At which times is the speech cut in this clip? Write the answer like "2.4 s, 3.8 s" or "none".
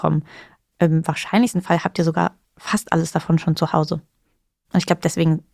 none